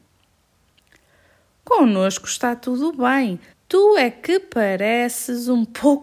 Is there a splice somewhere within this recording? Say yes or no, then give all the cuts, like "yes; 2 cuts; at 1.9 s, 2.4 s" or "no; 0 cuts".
yes; 1 cut; at 3.5 s